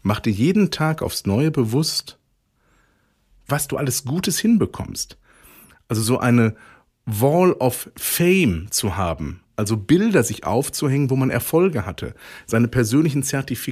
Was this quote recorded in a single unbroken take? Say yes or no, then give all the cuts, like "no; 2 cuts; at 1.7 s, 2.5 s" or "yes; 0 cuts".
yes; 0 cuts